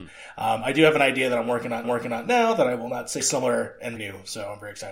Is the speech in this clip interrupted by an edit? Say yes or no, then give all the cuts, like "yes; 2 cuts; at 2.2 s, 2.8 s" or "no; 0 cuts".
yes; 3 cuts; at 1.8 s, 3.2 s, 4.0 s